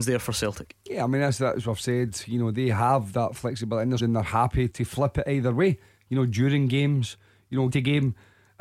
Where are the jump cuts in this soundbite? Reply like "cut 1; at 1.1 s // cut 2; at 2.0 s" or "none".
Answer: cut 1; at 2.5 s // cut 2; at 4.0 s // cut 3; at 4.7 s // cut 4; at 7.7 s